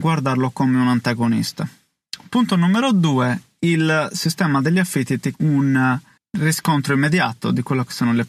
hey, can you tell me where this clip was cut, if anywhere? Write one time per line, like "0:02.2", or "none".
0:05.3
0:06.2